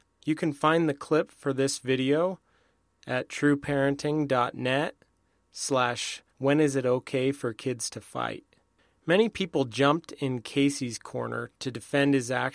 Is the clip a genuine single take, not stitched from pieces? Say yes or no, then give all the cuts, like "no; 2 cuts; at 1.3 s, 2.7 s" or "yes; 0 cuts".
no; 1 cut; at 6.3 s